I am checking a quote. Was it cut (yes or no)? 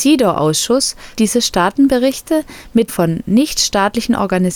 yes